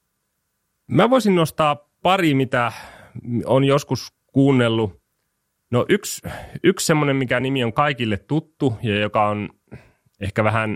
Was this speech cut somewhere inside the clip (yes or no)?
no